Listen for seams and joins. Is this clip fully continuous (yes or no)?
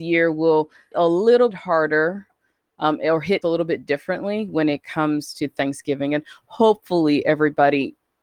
no